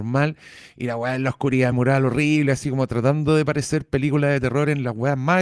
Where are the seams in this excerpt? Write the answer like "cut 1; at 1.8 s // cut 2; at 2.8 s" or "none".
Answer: cut 1; at 1.7 s